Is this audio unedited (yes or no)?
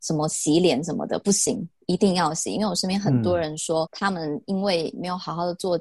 no